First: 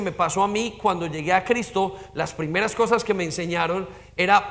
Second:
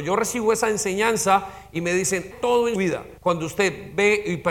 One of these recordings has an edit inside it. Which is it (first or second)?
second